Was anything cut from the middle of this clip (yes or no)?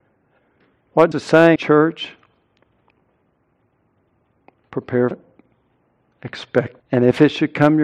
yes